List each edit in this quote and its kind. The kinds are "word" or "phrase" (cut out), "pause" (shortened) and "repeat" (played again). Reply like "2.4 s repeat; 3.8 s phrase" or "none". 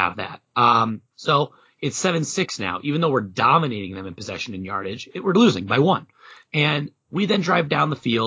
1.1 s pause; 6.4 s pause